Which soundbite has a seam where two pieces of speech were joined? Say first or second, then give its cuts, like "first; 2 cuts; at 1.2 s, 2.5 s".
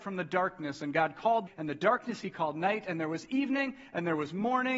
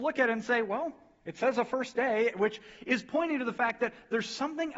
first; 1 cut; at 1.5 s